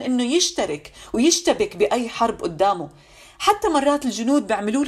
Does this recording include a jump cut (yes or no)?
no